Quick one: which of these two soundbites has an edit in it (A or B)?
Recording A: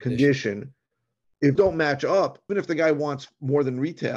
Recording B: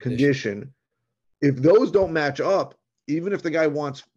A